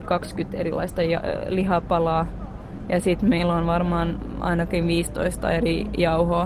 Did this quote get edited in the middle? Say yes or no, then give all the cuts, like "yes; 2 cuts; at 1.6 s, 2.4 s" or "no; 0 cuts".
no; 0 cuts